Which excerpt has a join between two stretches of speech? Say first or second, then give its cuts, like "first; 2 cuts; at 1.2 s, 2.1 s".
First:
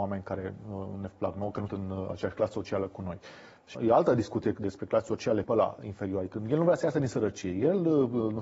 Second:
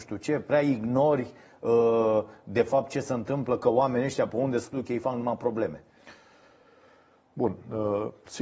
first; 3 cuts; at 1.7 s, 3.7 s, 5.4 s